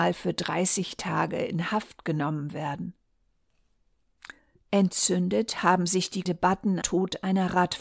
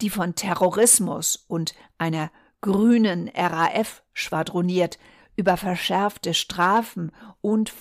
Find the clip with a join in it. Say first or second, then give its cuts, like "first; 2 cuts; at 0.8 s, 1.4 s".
first; 3 cuts; at 4.4 s, 6.3 s, 6.8 s